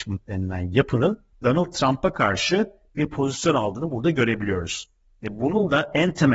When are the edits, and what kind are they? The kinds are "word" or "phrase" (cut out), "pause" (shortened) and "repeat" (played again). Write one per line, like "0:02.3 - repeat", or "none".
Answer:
0:01.3 - pause